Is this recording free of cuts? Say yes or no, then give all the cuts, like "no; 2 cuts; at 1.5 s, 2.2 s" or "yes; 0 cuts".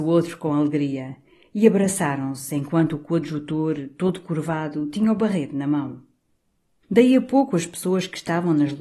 yes; 0 cuts